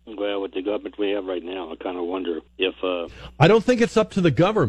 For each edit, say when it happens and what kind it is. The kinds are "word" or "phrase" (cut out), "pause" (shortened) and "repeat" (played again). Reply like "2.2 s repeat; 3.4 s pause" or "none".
2.5 s pause